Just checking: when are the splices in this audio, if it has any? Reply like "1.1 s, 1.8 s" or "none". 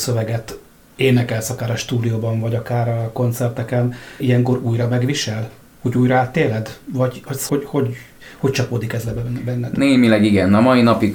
4.2 s, 7.5 s

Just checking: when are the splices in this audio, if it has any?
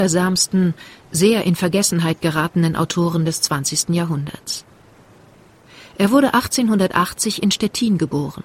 none

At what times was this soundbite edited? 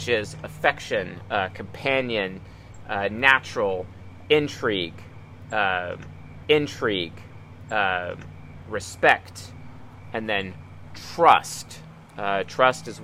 6.4 s

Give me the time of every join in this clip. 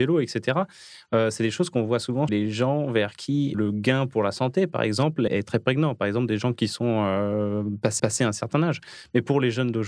2.3 s, 3.5 s, 5.3 s, 8.0 s

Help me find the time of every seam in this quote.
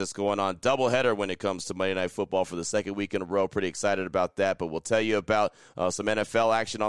none

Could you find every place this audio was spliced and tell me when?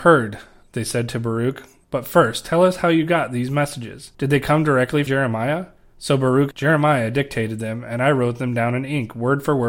4.1 s, 5.1 s, 5.8 s, 6.5 s

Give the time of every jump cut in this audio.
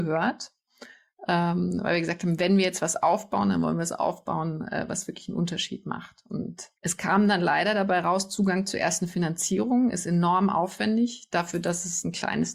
6.7 s

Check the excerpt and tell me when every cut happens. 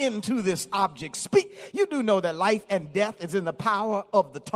none

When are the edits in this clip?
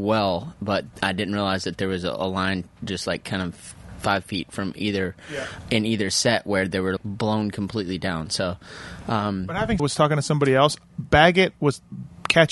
0.9 s, 7.0 s, 9.8 s

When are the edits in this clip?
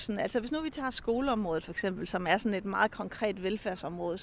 none

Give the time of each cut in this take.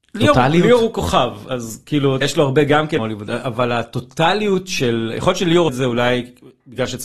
2.2 s, 3.0 s, 5.7 s

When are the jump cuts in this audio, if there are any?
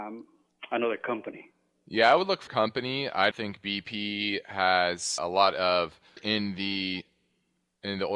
2.5 s, 3.3 s, 5.2 s, 6.2 s

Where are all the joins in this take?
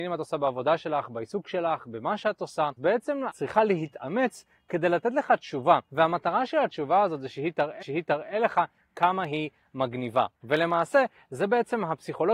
2.8 s, 3.3 s, 5.8 s, 7.8 s, 10.3 s

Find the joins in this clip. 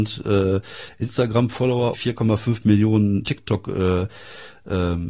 1.9 s

